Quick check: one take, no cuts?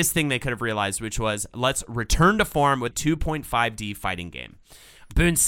no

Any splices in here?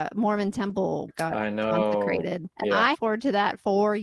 yes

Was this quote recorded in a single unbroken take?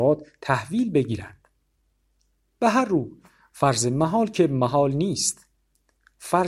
yes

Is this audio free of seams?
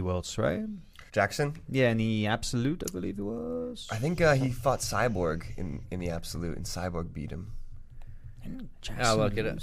no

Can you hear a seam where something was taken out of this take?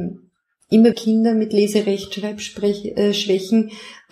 yes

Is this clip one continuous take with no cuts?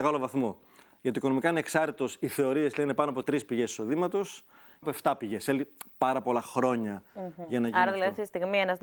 no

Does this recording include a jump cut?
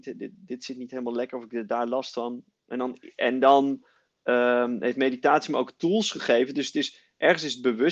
no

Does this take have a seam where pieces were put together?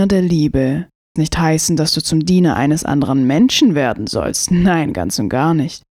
yes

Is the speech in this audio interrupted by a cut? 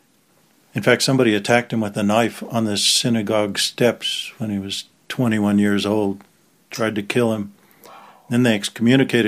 no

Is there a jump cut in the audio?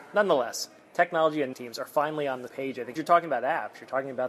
yes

